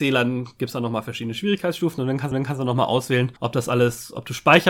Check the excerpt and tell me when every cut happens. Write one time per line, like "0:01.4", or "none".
0:02.3
0:03.4